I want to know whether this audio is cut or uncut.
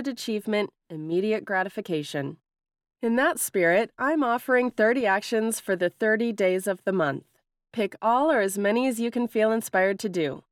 uncut